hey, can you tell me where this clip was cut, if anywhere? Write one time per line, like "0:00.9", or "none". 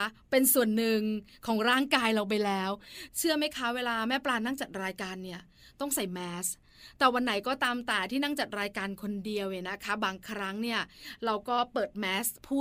none